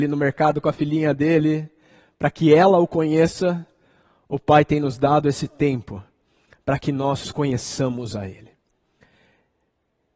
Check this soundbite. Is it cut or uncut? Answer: uncut